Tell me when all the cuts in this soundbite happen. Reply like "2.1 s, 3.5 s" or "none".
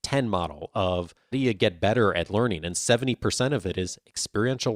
1.3 s